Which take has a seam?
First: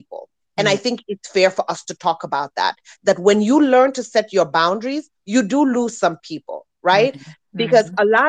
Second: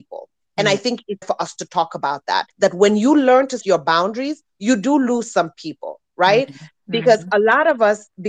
second; 3 cuts; at 1.2 s, 2.5 s, 3.6 s

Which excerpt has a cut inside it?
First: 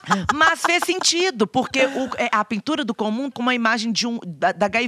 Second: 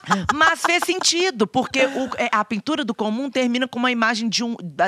first; 1 cut; at 3.3 s

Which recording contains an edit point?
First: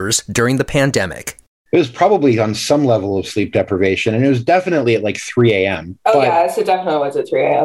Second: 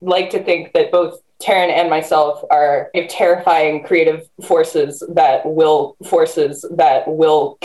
second; 2 cuts; at 2.9 s, 6.0 s

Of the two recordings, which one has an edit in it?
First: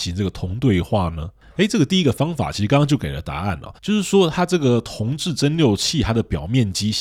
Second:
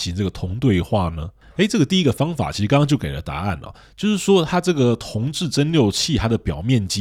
first; 1 cut; at 3.8 s

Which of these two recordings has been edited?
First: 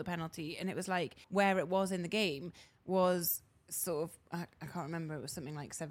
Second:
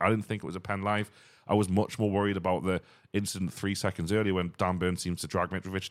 first; 1 cut; at 1.2 s

